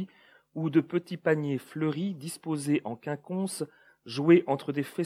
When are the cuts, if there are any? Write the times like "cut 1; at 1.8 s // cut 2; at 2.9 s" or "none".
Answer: none